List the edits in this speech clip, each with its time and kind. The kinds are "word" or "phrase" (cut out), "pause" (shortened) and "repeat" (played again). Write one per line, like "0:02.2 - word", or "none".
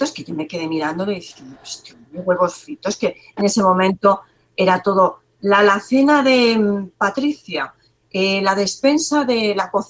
none